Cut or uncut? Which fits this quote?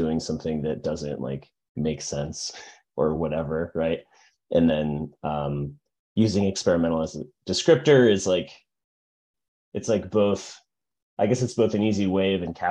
uncut